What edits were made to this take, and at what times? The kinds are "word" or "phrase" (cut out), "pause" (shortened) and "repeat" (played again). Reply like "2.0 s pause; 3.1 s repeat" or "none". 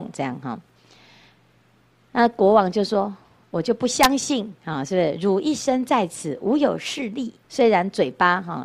7.4 s pause